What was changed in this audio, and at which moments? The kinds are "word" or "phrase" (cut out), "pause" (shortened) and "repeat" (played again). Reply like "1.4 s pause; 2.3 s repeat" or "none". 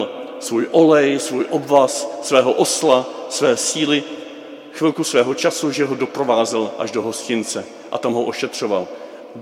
none